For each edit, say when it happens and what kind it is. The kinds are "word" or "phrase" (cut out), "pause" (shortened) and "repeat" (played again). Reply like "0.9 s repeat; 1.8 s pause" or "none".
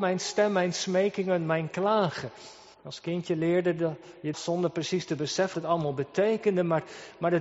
2.7 s pause; 4.3 s phrase; 5.5 s word